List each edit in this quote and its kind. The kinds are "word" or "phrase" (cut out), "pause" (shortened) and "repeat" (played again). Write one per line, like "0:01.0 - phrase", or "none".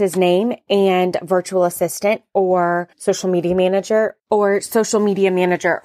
0:02.9 - pause